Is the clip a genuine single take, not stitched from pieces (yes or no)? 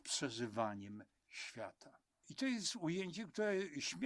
yes